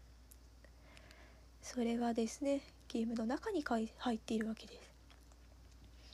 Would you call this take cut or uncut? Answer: uncut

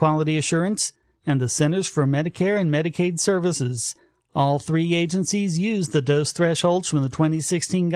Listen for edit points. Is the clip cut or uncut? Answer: uncut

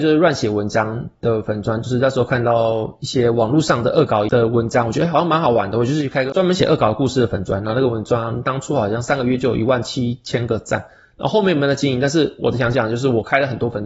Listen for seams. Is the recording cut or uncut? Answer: uncut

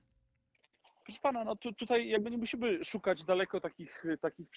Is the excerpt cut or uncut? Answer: uncut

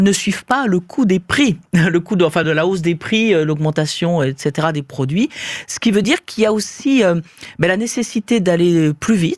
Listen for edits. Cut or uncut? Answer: uncut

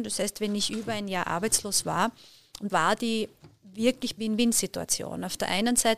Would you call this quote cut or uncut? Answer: cut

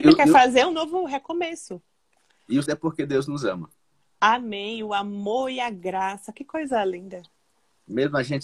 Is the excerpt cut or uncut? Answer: cut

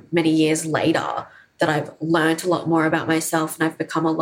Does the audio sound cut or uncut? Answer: uncut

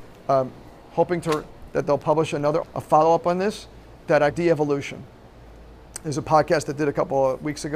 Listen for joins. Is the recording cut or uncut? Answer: cut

